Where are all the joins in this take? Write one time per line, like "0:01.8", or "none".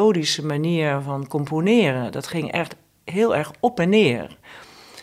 none